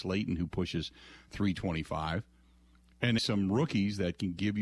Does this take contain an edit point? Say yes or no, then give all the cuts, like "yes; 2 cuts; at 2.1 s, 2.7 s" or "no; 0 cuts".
yes; 1 cut; at 3.2 s